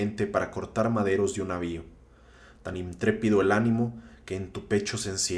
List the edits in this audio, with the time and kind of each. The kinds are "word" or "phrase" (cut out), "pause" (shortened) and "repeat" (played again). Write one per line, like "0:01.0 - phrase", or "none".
none